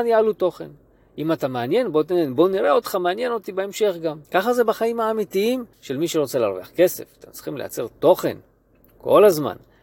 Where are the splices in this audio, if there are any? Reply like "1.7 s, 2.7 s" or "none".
4.2 s, 5.7 s